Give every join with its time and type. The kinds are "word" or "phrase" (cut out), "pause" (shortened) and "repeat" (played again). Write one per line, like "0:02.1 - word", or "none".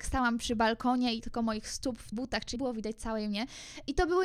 0:01.2 - word
0:02.1 - word
0:02.6 - word